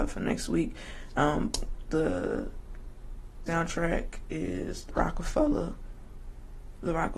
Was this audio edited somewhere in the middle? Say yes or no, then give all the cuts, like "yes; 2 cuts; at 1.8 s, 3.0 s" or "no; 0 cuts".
yes; 2 cuts; at 3.5 s, 4.9 s